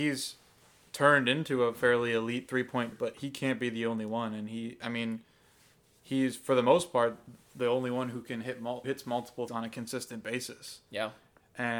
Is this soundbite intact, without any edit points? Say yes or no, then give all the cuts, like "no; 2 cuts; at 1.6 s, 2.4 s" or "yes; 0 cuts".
no; 3 cuts; at 2.9 s, 8.8 s, 9.5 s